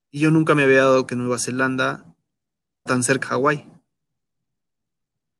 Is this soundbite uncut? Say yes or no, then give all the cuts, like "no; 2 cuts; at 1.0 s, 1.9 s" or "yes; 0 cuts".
no; 3 cuts; at 1.1 s, 2.9 s, 3.2 s